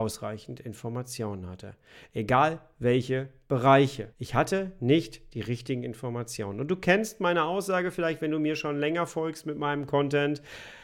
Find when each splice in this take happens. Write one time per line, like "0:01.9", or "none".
0:04.1